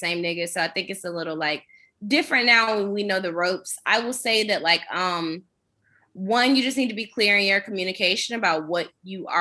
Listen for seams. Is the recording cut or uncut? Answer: uncut